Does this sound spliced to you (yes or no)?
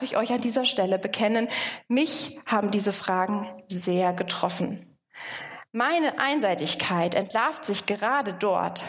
no